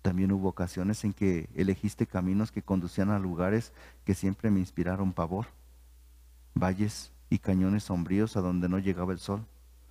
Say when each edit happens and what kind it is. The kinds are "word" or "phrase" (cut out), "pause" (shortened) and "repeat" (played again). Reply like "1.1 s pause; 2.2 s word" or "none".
none